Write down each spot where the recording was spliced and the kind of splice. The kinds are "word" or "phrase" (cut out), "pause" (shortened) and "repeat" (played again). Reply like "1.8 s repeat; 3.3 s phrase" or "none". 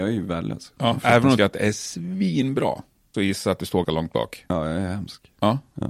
1.4 s word; 3.1 s word; 3.8 s word